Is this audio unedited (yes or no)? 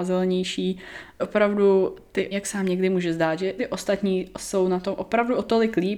no